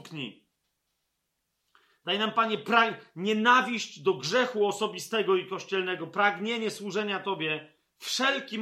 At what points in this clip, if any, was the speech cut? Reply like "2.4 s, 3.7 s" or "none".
none